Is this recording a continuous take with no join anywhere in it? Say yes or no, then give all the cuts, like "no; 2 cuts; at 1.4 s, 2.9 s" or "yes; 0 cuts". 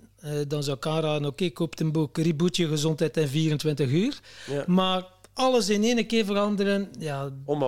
yes; 0 cuts